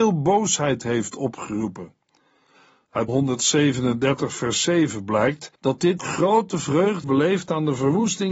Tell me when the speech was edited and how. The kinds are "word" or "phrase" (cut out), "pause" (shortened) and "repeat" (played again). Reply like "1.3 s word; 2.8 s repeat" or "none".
3.1 s word; 5.5 s pause; 6.0 s word; 7.0 s word